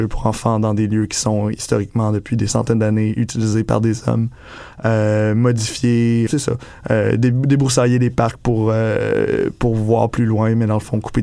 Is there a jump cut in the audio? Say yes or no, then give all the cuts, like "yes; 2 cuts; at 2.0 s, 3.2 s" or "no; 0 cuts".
yes; 1 cut; at 6.3 s